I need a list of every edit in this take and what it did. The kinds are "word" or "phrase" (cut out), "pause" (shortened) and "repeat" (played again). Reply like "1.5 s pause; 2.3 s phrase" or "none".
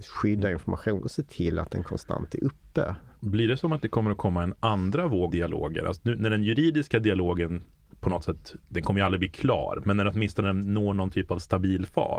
5.3 s word; 8.6 s pause; 10.4 s word